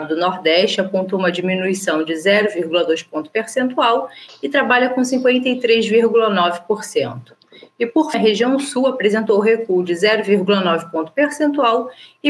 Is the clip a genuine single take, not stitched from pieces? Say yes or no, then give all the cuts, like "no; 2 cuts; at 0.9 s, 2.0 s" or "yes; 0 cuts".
no; 1 cut; at 8.1 s